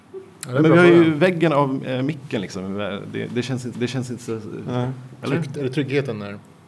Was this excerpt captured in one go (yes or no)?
no